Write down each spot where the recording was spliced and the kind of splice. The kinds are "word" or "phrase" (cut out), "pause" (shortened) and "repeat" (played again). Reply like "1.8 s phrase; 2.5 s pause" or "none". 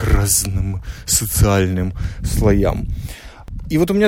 none